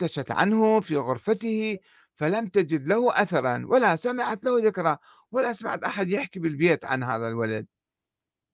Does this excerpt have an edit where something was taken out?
no; 0 cuts

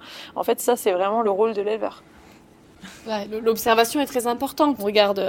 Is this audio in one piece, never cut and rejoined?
yes; 0 cuts

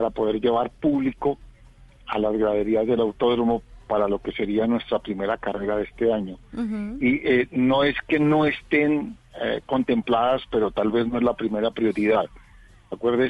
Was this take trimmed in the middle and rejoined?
no; 0 cuts

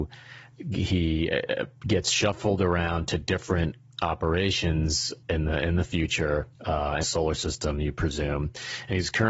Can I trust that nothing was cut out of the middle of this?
no; 3 cuts; at 5.2 s, 6.6 s, 7.0 s

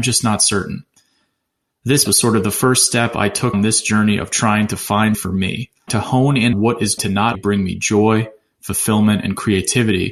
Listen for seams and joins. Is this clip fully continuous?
no; 7 cuts; at 2.1 s, 3.5 s, 5.1 s, 5.9 s, 6.5 s, 7.0 s, 7.3 s

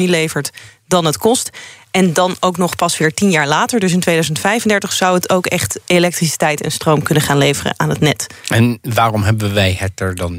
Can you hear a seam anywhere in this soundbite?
no; 0 cuts

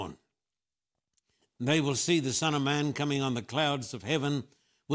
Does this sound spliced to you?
no; 0 cuts

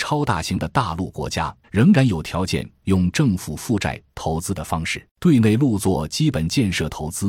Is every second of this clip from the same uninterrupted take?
no; 2 cuts; at 1.6 s, 5.1 s

